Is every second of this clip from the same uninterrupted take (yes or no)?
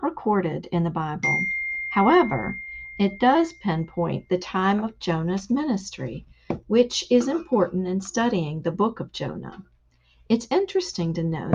yes